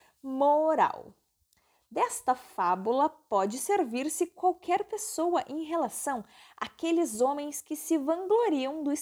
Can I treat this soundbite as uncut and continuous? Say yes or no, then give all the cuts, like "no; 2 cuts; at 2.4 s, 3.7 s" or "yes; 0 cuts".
yes; 0 cuts